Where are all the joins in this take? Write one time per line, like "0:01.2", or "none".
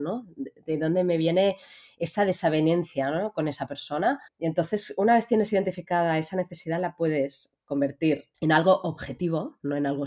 0:04.3
0:08.3